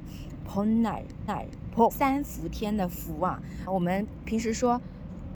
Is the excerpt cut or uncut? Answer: cut